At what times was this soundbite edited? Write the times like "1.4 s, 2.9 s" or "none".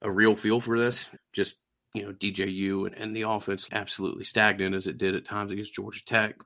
1.2 s, 2.9 s, 3.7 s